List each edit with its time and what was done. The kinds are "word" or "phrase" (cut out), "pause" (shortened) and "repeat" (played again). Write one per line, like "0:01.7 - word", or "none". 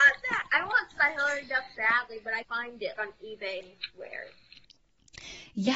0:00.9 - word
0:01.7 - word
0:02.4 - word
0:03.0 - word
0:03.6 - word

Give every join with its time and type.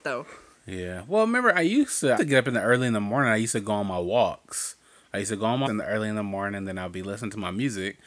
0:02.2 - word
0:05.7 - word

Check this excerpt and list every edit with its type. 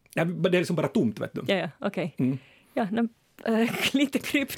none

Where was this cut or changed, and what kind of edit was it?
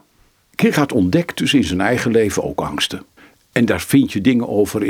0:03.2 - pause

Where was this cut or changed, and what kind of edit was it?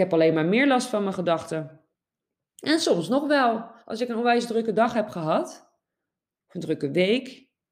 none

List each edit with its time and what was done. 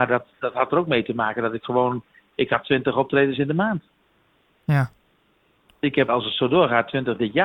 0:06.1 - word

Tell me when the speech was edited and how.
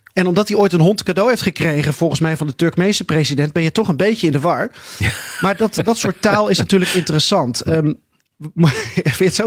none

